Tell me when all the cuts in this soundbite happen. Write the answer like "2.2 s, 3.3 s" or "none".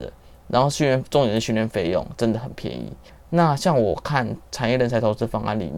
3.1 s